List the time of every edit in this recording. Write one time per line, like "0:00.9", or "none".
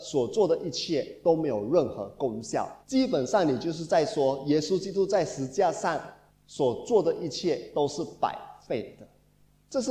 0:02.8
0:06.3